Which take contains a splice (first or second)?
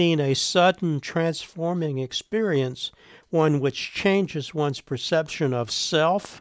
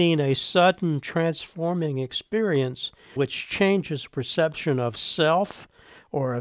second